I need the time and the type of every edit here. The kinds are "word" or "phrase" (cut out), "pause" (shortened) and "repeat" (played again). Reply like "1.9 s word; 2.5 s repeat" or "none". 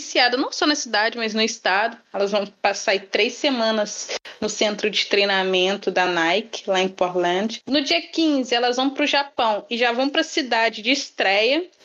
none